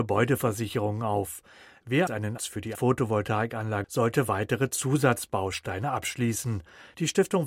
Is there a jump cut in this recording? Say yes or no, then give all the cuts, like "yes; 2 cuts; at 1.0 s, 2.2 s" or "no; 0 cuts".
yes; 4 cuts; at 2.1 s, 2.4 s, 2.7 s, 3.8 s